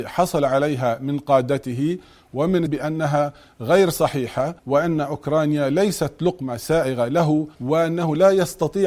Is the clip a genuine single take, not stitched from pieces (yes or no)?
no